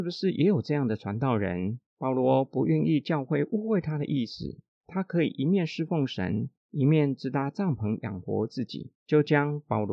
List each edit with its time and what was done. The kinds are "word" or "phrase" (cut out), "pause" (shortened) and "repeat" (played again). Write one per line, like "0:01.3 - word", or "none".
0:01.9 - pause
0:04.7 - pause
0:06.6 - pause
0:08.9 - pause

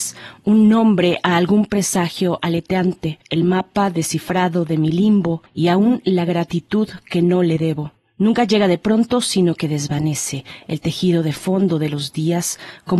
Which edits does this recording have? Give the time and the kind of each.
0:03.2 - pause
0:05.5 - pause
0:08.0 - pause

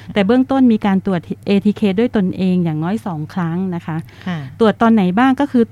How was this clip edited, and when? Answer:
none

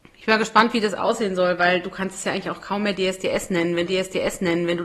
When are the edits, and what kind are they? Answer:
0:03.9 - repeat

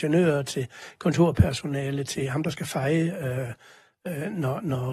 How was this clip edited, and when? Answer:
none

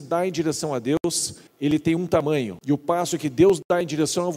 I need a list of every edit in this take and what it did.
0:01.5 - pause
0:02.6 - pause

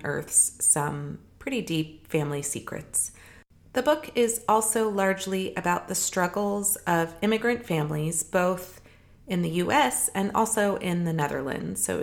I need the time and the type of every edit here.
none

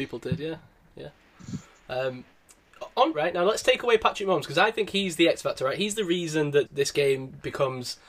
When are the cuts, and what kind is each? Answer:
0:03.1 - word
0:06.7 - word

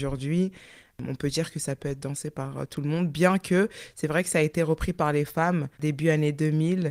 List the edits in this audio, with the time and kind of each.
0:05.7 - pause

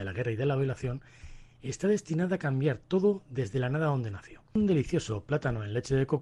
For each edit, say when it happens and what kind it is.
none

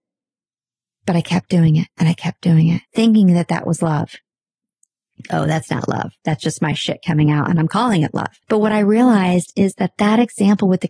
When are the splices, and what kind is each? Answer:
0:02.8 - pause
0:06.2 - pause
0:08.4 - pause

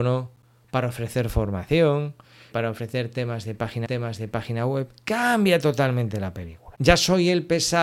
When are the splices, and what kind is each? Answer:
0:02.5 - word
0:03.8 - repeat
0:06.7 - pause

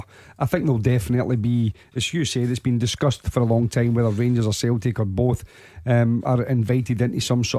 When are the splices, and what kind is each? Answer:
none

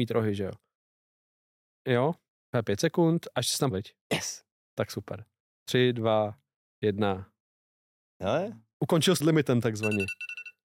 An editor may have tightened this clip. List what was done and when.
0:03.7 - word
0:04.0 - pause
0:09.2 - phrase

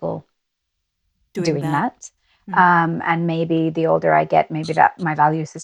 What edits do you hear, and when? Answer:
none

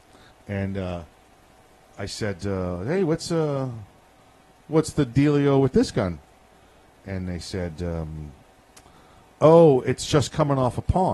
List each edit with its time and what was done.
none

